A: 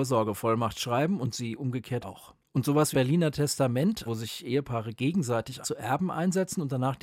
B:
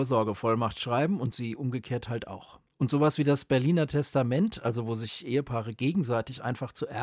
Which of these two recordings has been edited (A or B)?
A